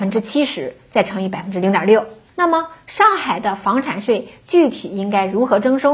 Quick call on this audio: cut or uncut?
cut